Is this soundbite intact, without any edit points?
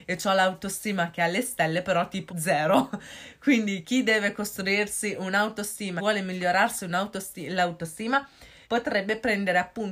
no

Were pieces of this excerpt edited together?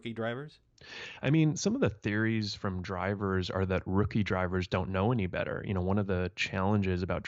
no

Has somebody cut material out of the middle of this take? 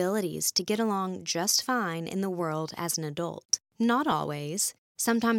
no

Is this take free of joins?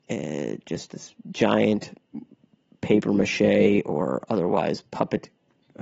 yes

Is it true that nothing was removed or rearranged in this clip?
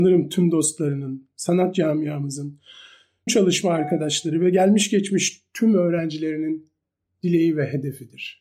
no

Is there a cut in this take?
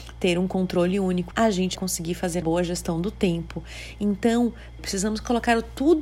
yes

